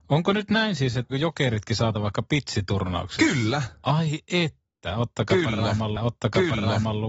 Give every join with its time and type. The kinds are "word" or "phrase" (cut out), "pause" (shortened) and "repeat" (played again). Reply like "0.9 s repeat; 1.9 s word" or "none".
1.1 s word; 1.9 s word; 6.0 s repeat